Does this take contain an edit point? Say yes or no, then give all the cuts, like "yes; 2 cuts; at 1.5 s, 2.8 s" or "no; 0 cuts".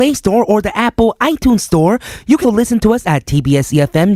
yes; 1 cut; at 2.4 s